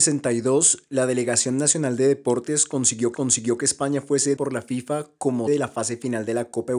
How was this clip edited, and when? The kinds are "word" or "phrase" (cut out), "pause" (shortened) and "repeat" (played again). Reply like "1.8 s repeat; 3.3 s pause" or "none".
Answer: 3.1 s repeat; 4.4 s word; 5.5 s word